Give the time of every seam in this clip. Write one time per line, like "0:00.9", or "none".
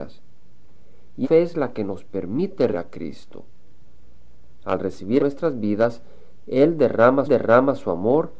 0:01.2
0:02.7
0:05.2
0:07.3